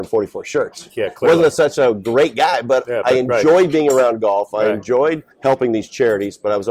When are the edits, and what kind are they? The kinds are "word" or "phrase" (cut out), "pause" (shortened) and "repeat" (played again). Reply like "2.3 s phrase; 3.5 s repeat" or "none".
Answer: 5.3 s pause

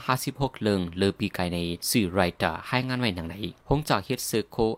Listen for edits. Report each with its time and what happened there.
1.8 s pause; 3.6 s pause

